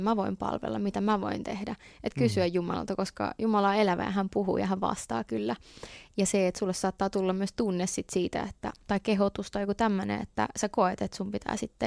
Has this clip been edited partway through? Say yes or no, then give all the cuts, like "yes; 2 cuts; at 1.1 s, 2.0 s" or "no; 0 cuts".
no; 0 cuts